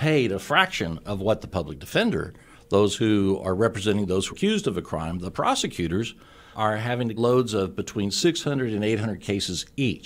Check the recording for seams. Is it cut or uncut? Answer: cut